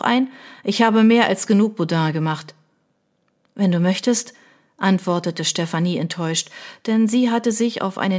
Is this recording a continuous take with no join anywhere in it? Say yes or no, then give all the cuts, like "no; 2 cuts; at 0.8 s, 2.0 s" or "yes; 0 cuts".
yes; 0 cuts